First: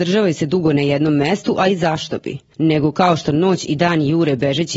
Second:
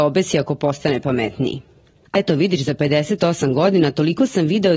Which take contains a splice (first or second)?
second